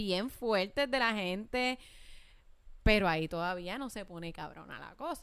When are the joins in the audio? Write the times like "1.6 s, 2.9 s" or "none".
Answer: none